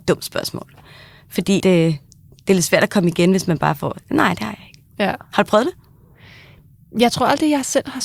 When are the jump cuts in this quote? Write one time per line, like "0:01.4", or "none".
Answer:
0:01.6

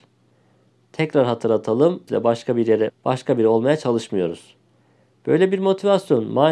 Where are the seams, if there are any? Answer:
0:02.1
0:02.9

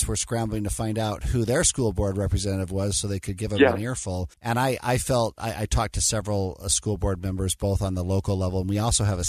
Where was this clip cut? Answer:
0:04.3

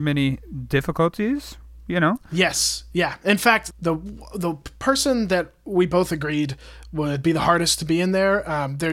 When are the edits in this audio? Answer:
0:03.7

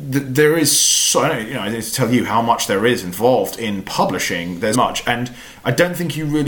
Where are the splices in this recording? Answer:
0:04.7

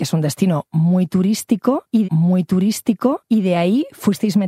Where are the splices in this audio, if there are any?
0:02.0

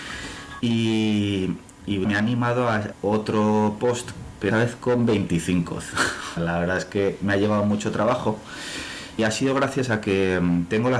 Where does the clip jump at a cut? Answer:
0:02.0
0:02.9
0:04.5
0:06.4
0:09.2

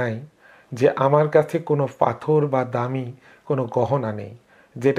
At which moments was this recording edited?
none

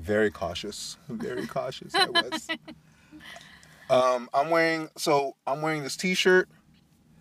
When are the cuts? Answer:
none

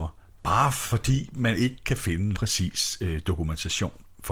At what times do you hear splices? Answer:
0:02.3

